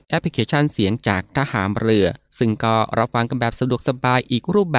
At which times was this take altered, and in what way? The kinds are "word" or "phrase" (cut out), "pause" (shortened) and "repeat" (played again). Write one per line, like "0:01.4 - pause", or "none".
0:02.3 - pause